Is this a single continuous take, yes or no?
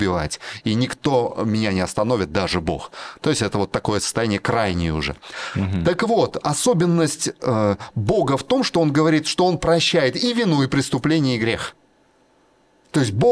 yes